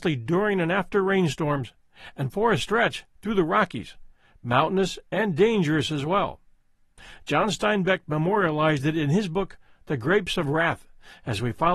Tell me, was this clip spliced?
no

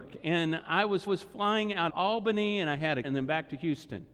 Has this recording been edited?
yes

